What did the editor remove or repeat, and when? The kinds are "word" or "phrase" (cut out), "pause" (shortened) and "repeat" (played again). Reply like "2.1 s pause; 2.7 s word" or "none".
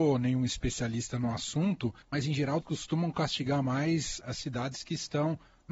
2.0 s pause; 2.6 s word; 4.2 s word